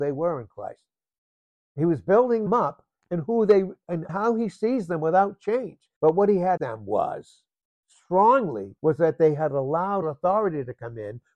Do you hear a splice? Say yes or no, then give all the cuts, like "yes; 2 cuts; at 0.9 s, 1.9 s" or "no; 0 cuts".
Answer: yes; 6 cuts; at 2.5 s, 4.1 s, 6.0 s, 6.6 s, 8.8 s, 10.0 s